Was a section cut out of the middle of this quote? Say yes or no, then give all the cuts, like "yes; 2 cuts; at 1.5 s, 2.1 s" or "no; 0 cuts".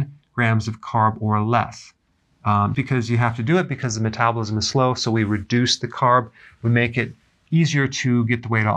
yes; 1 cut; at 2.7 s